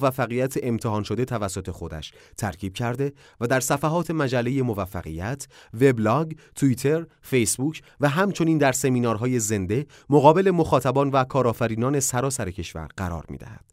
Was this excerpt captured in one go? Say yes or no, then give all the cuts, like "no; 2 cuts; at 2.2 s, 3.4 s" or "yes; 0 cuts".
yes; 0 cuts